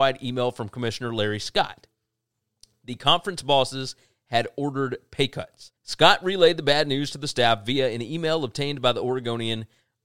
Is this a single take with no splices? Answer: no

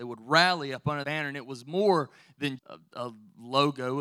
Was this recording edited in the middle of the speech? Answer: yes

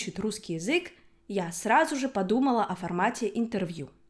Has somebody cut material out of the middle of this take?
no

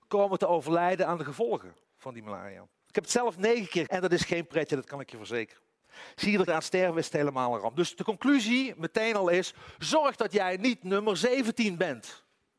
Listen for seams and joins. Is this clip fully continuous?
no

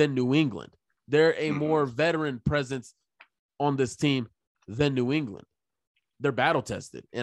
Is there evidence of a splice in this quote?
no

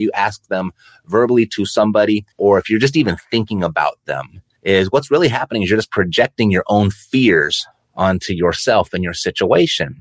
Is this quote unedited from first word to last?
no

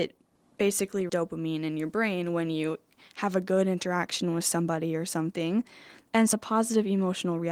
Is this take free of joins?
no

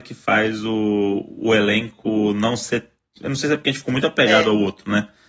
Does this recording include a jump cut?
no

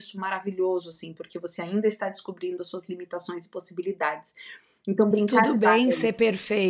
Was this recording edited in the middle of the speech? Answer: no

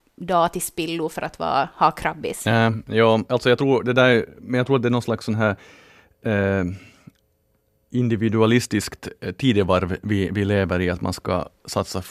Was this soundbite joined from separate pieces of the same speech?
no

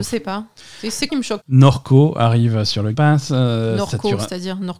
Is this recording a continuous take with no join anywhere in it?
no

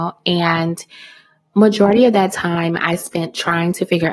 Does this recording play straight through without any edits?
yes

